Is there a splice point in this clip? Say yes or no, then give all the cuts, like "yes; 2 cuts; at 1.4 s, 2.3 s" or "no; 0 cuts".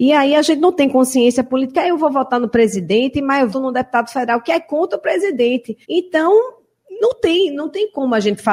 yes; 2 cuts; at 3.5 s, 5.8 s